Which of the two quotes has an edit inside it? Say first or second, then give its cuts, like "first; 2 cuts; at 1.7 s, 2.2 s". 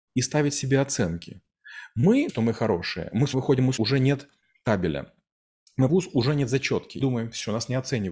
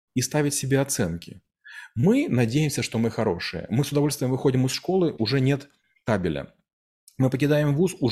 first; 5 cuts; at 2.3 s, 3.3 s, 3.8 s, 5.9 s, 7.0 s